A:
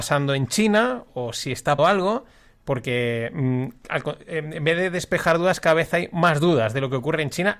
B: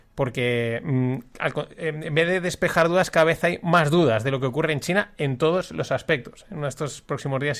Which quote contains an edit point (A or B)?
A